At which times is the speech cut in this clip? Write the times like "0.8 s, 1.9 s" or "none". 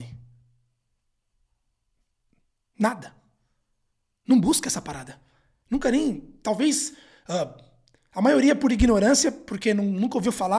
none